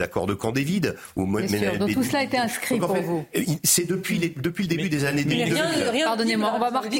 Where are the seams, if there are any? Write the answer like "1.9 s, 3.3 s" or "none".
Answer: none